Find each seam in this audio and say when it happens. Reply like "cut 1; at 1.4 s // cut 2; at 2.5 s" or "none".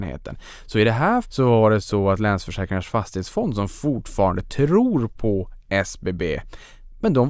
cut 1; at 1.2 s